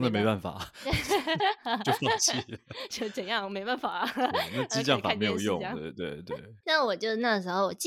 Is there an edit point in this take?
yes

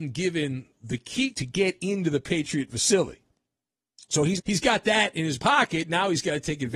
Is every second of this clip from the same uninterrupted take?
no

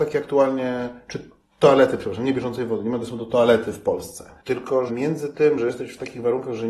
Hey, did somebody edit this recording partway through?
yes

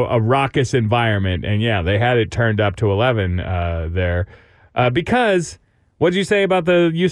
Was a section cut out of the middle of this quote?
no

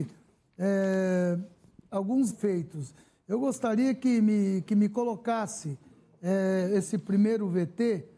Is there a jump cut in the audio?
yes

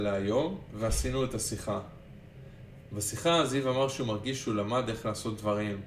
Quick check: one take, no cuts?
yes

